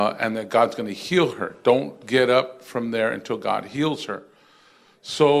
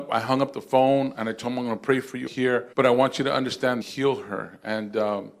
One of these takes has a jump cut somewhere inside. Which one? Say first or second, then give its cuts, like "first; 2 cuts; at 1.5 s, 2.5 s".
second; 3 cuts; at 2.3 s, 2.7 s, 3.8 s